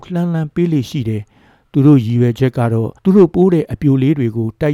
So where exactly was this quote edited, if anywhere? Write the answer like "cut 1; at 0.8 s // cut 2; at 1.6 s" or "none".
cut 1; at 3.0 s